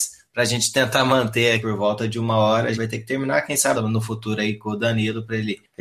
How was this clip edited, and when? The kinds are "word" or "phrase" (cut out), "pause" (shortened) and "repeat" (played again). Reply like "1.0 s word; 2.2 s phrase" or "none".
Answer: 1.6 s phrase; 2.7 s word; 3.7 s phrase